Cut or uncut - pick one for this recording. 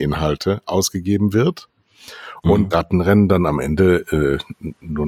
cut